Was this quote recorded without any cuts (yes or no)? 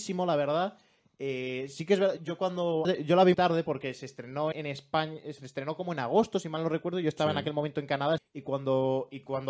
no